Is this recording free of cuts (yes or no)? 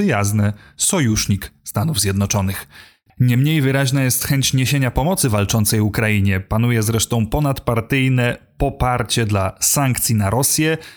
yes